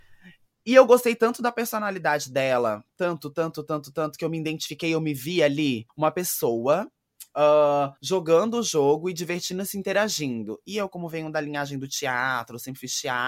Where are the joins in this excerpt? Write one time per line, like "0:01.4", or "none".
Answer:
0:05.9
0:08.0